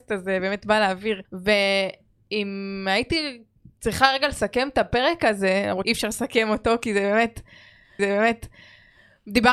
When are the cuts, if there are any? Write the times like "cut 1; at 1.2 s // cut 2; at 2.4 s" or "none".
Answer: cut 1; at 1.2 s // cut 2; at 3.6 s // cut 3; at 5.8 s // cut 4; at 8.0 s